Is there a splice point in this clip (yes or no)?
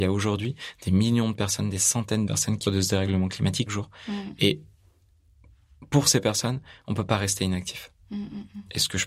yes